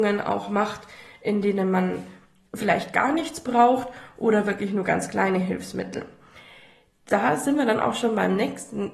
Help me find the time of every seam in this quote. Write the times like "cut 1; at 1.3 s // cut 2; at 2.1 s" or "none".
none